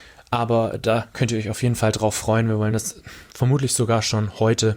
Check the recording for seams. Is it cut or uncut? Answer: uncut